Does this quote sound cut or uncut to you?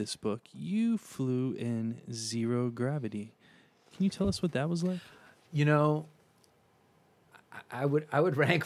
uncut